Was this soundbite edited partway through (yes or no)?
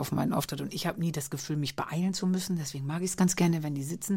no